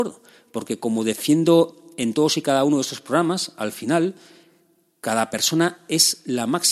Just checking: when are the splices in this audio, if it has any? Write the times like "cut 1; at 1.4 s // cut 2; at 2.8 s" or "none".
none